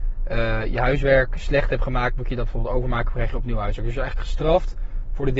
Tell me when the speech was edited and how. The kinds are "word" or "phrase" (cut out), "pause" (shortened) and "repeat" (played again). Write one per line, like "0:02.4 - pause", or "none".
none